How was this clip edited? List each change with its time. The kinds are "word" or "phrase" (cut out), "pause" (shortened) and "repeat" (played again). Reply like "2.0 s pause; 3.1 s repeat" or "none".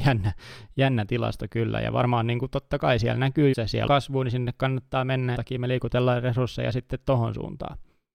3.5 s word; 3.9 s word; 5.3 s phrase